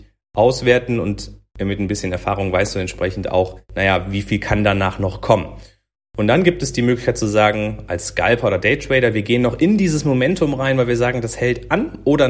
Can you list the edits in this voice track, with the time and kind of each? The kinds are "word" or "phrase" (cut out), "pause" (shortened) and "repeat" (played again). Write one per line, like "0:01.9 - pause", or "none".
none